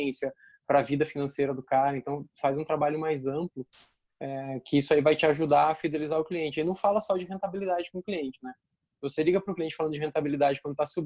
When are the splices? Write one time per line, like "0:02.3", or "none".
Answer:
none